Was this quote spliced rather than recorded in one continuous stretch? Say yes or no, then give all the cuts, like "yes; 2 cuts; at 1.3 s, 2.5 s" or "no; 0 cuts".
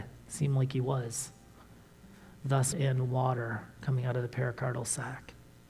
yes; 1 cut; at 2.7 s